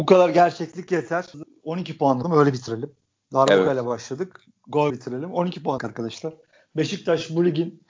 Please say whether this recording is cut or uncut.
cut